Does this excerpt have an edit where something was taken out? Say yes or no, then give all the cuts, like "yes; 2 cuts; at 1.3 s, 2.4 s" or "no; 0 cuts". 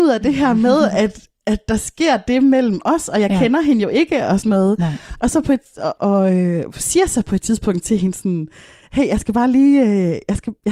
yes; 1 cut; at 6.0 s